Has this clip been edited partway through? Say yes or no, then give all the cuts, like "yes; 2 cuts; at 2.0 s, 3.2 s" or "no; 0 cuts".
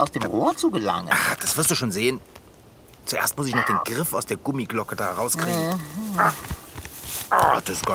no; 0 cuts